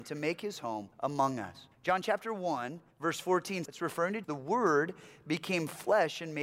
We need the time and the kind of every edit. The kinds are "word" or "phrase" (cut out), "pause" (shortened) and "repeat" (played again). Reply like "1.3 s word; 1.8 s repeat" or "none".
0.9 s pause; 1.7 s pause; 2.9 s pause; 3.6 s phrase; 4.2 s word